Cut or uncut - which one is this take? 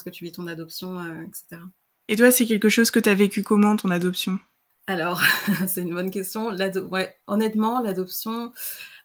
uncut